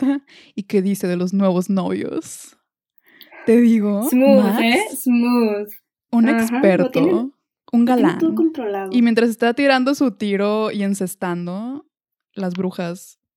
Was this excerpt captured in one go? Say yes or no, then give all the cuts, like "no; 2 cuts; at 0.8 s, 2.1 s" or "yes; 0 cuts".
yes; 0 cuts